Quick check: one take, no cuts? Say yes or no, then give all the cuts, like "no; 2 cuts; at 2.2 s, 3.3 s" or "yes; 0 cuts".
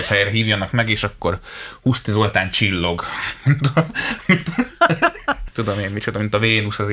no; 1 cut; at 5.5 s